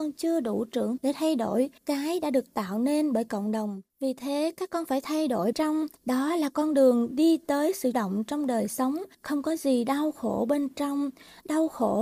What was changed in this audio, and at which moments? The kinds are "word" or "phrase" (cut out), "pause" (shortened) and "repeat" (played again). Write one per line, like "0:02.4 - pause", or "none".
0:01.0 - word
0:01.8 - pause
0:03.9 - pause
0:05.5 - phrase
0:06.0 - pause
0:07.9 - word
0:09.1 - pause